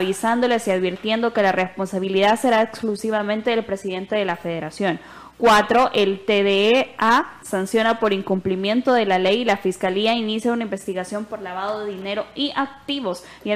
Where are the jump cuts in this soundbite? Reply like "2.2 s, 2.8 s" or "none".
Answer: none